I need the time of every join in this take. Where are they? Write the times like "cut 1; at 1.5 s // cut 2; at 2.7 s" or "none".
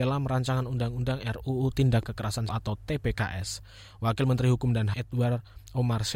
cut 1; at 2.1 s // cut 2; at 2.5 s // cut 3; at 4.9 s